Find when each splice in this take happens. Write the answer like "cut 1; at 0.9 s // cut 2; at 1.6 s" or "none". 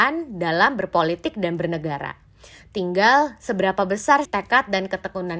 cut 1; at 4.2 s